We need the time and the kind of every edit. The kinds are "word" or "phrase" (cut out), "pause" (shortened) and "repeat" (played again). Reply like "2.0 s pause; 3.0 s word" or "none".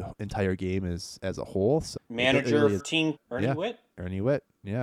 1.2 s word; 2.0 s word; 2.8 s word; 3.2 s word

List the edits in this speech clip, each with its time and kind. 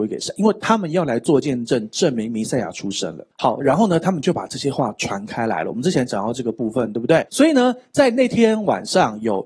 3.3 s pause; 7.3 s pause

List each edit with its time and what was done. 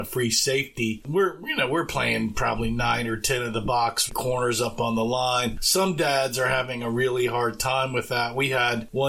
4.1 s word

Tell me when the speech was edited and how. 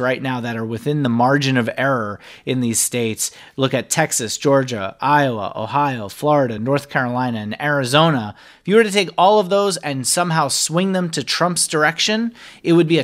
none

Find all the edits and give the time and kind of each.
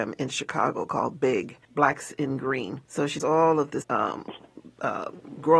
1.6 s pause; 2.8 s pause; 3.2 s word; 3.8 s word

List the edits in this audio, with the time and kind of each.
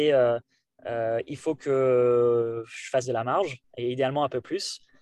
none

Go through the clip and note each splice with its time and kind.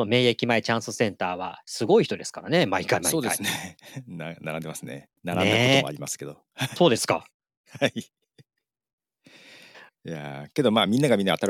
5.2 s pause; 6.8 s phrase; 7.3 s pause

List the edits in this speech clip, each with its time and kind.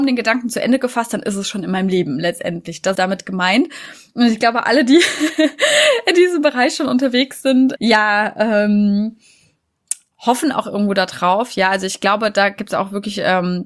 2.9 s word; 7.8 s word

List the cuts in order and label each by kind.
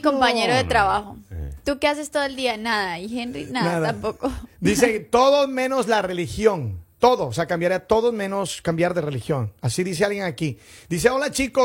none

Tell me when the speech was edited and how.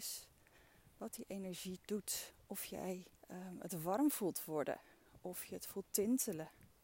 3.2 s pause

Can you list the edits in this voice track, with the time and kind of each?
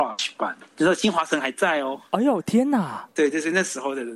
3.1 s pause

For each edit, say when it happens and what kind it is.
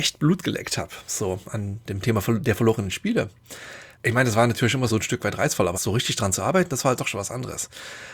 3.9 s pause; 4.9 s word; 5.7 s word

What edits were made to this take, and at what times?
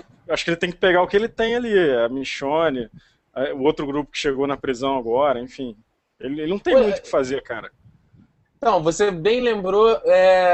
none

